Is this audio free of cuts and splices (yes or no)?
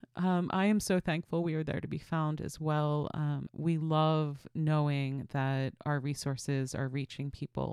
yes